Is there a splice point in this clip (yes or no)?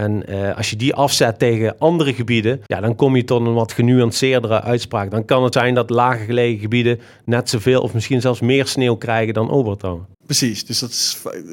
yes